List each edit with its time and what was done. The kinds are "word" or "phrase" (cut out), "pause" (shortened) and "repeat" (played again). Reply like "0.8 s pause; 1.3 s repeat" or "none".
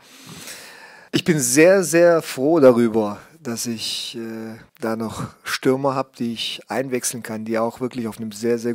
1.1 s pause; 4.7 s pause